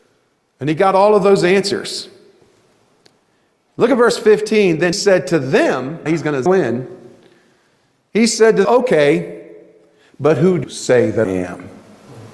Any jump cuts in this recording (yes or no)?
yes